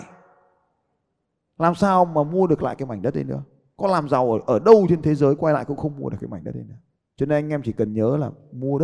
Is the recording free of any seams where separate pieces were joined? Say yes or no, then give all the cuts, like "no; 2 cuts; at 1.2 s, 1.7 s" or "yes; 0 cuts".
yes; 0 cuts